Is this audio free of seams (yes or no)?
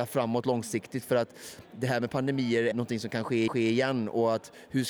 no